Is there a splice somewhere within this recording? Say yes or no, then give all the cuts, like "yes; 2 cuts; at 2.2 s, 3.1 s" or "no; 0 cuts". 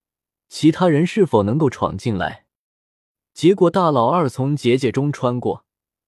no; 0 cuts